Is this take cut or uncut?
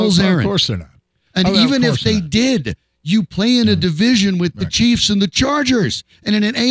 uncut